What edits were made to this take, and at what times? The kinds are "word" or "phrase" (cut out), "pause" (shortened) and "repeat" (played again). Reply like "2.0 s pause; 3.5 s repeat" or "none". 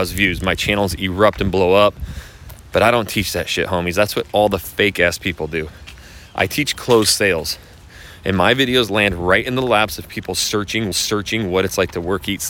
10.9 s repeat